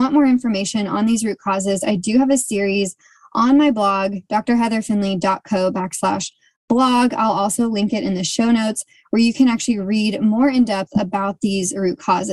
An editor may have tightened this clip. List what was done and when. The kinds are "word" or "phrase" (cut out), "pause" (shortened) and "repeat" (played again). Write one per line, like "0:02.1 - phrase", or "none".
none